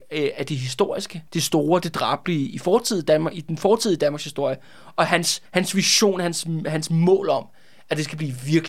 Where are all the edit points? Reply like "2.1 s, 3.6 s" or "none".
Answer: 1.3 s, 5.5 s